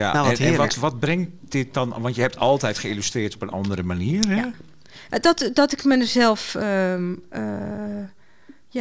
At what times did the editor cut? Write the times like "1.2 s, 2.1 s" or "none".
none